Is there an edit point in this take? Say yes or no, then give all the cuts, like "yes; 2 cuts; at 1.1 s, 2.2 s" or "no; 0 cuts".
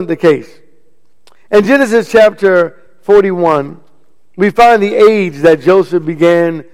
no; 0 cuts